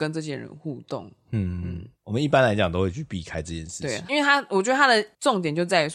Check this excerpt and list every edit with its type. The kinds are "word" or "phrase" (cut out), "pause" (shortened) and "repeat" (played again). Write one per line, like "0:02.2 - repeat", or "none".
0:01.9 - pause
0:04.1 - word